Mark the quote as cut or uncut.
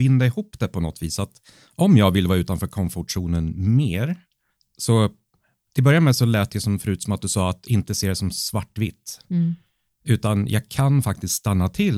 cut